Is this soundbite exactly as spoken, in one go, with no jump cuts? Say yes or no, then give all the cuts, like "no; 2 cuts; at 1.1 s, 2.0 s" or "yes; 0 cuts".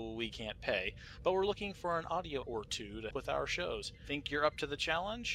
no; 2 cuts; at 2.4 s, 3.1 s